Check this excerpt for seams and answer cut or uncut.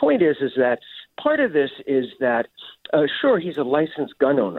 uncut